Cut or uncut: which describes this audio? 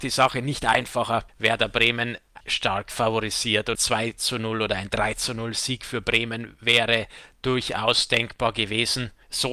cut